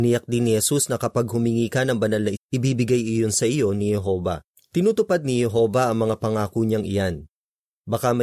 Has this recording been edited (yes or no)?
yes